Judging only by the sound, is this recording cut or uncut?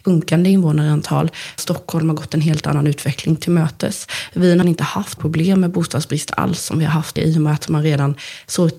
cut